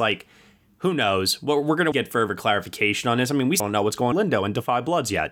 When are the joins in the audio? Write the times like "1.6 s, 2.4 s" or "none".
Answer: 1.9 s, 3.6 s, 4.1 s